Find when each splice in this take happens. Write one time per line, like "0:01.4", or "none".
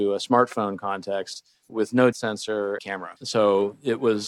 0:02.1
0:02.8
0:03.2